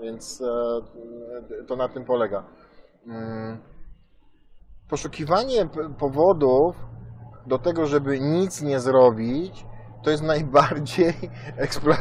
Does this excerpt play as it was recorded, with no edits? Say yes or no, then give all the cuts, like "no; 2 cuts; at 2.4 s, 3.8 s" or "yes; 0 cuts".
yes; 0 cuts